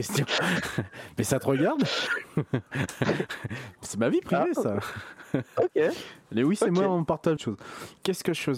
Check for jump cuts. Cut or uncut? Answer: cut